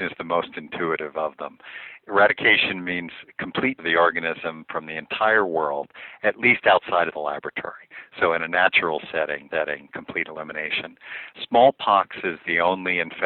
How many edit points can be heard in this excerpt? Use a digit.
2